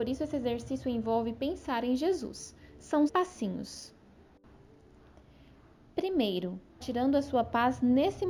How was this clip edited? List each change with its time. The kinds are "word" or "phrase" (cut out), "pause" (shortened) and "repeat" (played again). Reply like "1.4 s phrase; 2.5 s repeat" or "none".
3.1 s word; 6.8 s phrase